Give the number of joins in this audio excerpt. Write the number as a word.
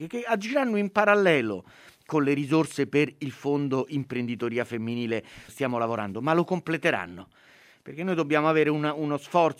one